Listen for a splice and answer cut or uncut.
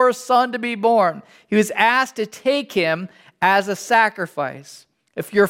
uncut